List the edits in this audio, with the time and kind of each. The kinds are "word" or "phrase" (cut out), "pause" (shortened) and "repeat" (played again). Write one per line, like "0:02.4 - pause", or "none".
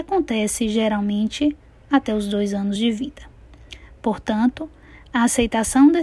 none